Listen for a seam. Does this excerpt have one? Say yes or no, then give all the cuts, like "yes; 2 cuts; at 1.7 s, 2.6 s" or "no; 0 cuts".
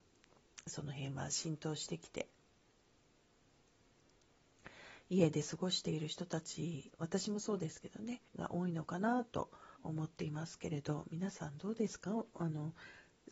yes; 2 cuts; at 8.3 s, 9.8 s